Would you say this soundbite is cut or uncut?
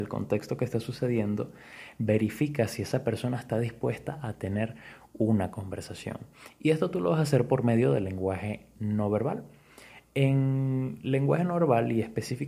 uncut